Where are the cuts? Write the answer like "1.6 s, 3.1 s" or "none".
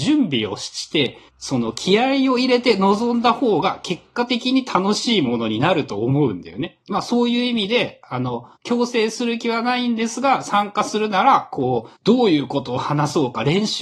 1.3 s, 6.8 s, 8.6 s, 12.0 s